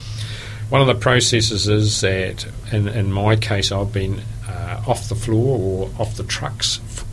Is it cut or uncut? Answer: uncut